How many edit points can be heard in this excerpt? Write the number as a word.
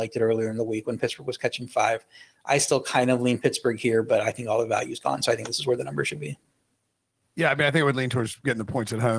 zero